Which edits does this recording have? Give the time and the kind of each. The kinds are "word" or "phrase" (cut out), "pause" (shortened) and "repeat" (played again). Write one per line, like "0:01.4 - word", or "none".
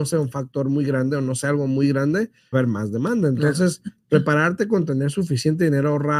0:02.5 - phrase